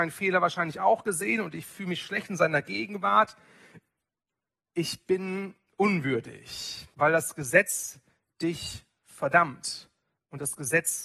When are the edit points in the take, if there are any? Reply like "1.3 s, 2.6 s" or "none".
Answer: 6.9 s